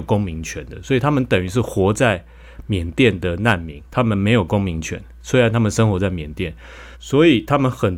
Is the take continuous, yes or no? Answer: no